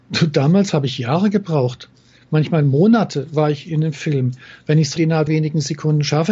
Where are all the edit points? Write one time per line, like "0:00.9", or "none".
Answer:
0:05.0
0:05.3